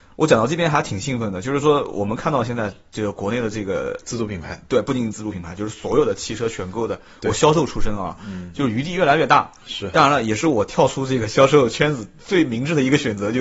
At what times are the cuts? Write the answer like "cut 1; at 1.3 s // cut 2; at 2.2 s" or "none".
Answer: none